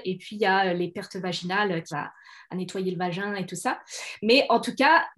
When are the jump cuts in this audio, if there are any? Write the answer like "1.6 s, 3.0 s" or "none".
1.9 s